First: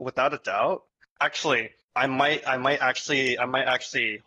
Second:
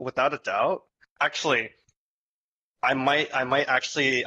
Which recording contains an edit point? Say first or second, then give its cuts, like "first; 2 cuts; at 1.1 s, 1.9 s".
first; 1 cut; at 1.8 s